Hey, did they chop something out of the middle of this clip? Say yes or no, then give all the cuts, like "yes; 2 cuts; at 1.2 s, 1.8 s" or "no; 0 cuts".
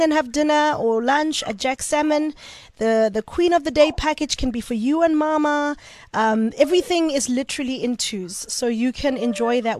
no; 0 cuts